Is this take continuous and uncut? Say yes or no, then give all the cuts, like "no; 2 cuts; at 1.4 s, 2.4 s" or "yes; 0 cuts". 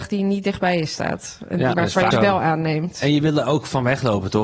no; 2 cuts; at 1.7 s, 2.1 s